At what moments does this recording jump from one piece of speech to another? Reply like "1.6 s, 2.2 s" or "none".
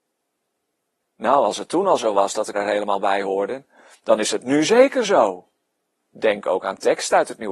2.5 s